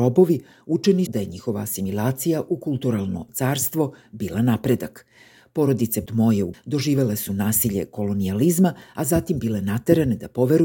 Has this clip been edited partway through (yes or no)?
yes